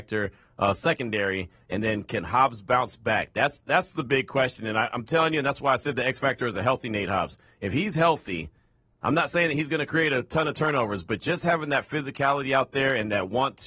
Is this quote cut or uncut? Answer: uncut